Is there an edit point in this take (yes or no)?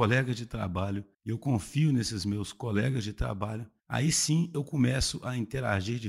yes